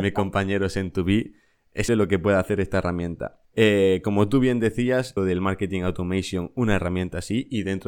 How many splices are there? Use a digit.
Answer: 3